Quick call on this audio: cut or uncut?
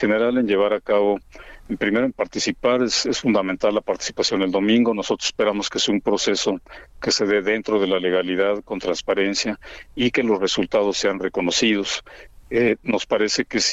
uncut